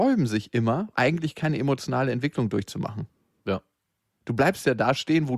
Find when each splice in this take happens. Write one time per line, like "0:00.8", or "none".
0:00.9